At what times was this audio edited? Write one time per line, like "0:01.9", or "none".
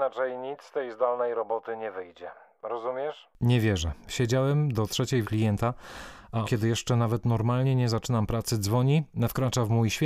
0:03.3
0:05.2
0:06.4